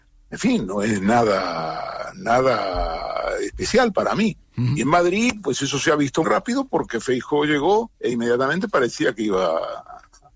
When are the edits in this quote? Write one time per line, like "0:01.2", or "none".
0:06.2
0:07.9